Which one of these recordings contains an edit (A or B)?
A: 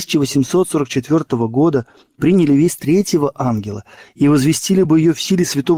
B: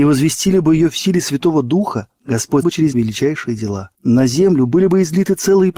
B